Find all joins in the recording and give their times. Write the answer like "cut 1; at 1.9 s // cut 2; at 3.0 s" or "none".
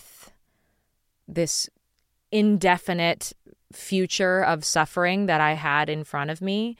none